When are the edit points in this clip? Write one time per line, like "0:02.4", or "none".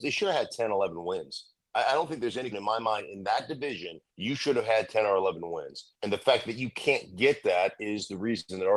0:02.5
0:04.1
0:06.0